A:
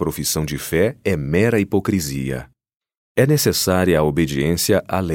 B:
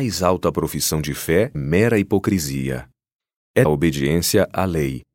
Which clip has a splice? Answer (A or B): B